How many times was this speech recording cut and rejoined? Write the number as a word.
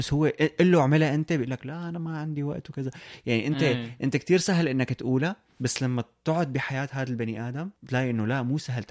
one